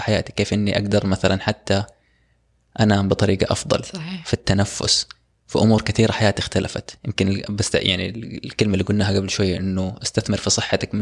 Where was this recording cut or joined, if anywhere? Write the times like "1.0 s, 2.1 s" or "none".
none